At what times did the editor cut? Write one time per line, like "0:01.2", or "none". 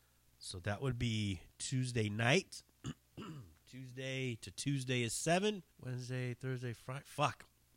0:03.0
0:05.7